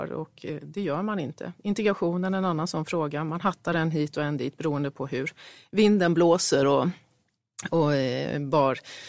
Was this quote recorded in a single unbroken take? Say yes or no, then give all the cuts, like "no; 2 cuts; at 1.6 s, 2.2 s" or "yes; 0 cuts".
yes; 0 cuts